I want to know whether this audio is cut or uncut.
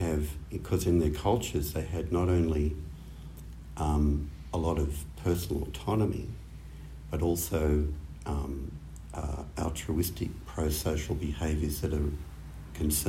uncut